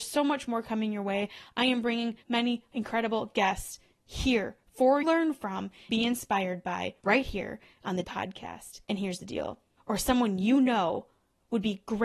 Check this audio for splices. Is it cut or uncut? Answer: cut